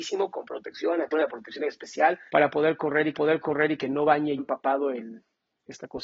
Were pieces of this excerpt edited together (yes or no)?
yes